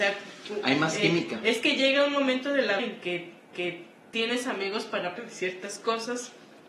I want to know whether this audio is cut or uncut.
cut